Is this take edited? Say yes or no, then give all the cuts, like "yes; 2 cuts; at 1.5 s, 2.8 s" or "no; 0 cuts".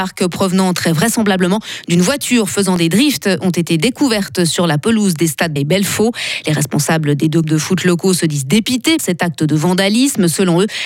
yes; 3 cuts; at 5.6 s, 7.4 s, 9.0 s